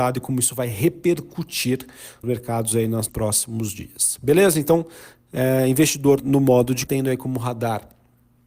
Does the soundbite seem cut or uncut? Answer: cut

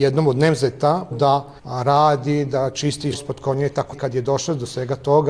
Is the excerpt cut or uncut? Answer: cut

